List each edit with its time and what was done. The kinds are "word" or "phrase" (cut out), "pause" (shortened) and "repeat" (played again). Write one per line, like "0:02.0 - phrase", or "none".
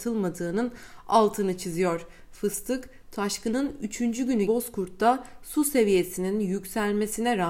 0:04.5 - word